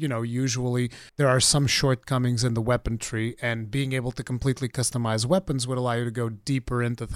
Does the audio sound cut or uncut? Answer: cut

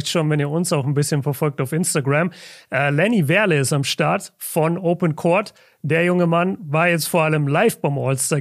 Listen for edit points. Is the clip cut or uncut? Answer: uncut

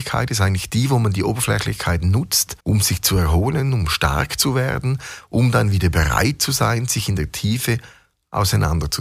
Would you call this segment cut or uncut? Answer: cut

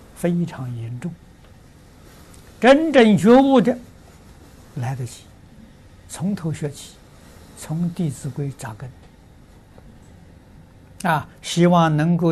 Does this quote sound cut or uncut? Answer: cut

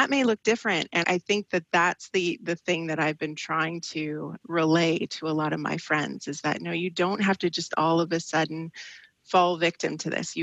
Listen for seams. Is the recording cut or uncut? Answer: cut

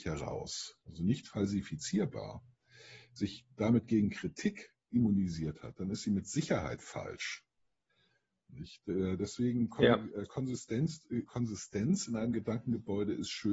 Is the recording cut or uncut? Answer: cut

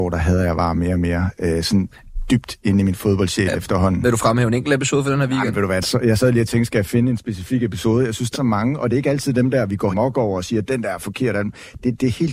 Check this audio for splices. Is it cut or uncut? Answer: cut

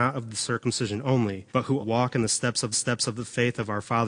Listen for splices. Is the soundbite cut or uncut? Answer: cut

